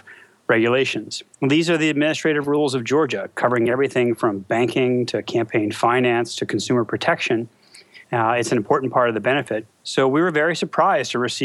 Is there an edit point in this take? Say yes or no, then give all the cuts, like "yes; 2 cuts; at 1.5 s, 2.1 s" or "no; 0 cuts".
yes; 3 cuts; at 1.3 s, 8.0 s, 9.7 s